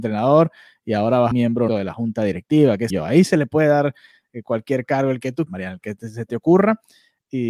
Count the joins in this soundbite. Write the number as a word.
four